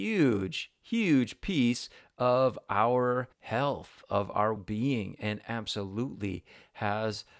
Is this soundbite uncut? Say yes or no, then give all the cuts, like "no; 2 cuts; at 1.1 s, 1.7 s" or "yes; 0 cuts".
no; 2 cuts; at 3.3 s, 4.6 s